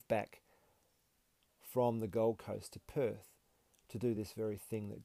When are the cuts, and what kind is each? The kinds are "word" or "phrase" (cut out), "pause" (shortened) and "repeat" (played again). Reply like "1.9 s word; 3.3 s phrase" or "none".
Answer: none